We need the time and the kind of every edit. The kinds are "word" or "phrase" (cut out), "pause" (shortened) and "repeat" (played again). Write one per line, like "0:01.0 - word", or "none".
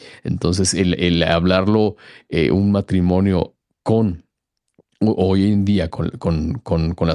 none